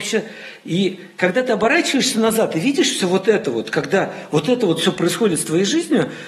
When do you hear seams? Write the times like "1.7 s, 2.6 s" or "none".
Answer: none